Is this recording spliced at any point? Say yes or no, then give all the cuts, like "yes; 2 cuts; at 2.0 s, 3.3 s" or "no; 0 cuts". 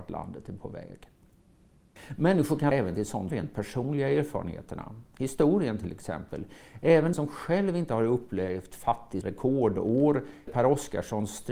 yes; 5 cuts; at 2.7 s, 3.3 s, 7.1 s, 9.2 s, 10.5 s